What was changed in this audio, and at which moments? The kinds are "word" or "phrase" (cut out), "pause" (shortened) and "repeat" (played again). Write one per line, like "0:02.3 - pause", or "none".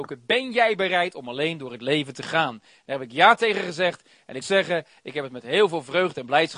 0:04.4 - word